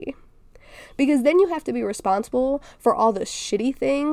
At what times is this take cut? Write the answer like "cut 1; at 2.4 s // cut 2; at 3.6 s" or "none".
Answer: none